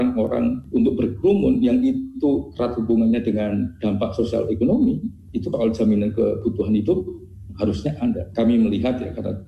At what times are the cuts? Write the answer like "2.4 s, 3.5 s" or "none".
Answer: 5.5 s